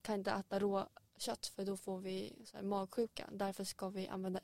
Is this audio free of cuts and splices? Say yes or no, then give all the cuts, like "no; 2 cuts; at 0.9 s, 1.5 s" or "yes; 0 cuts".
yes; 0 cuts